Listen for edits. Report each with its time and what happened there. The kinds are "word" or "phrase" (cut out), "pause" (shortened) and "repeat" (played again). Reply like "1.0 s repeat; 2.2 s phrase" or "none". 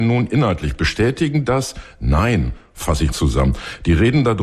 1.5 s word; 3.1 s word